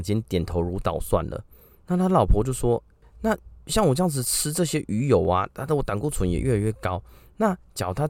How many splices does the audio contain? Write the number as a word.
one